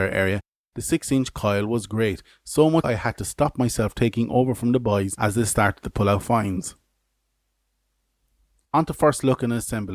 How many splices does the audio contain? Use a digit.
1